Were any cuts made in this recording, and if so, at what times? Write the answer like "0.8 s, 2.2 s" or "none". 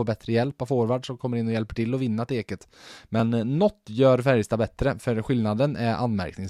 none